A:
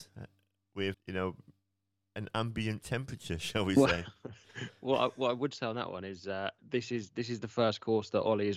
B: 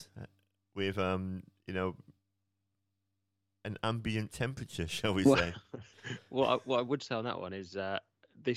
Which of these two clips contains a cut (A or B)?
A